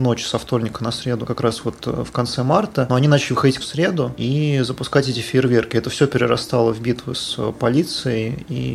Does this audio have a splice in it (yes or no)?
yes